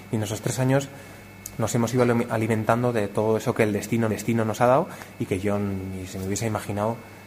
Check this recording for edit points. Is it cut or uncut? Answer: cut